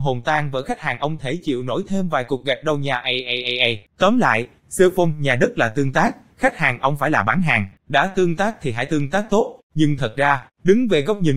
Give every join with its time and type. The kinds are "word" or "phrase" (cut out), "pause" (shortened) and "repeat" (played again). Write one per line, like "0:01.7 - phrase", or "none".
0:03.9 - pause
0:07.8 - pause
0:09.6 - pause